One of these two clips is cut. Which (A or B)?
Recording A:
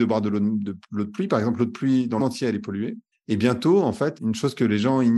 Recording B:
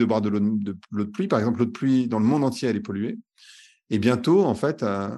A